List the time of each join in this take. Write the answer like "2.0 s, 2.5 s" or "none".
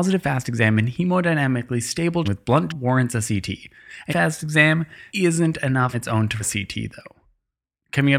2.2 s, 2.7 s, 4.1 s, 5.1 s, 5.9 s, 6.4 s